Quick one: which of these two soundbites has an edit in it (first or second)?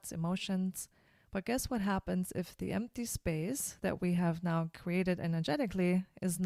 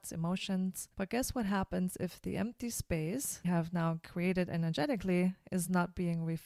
second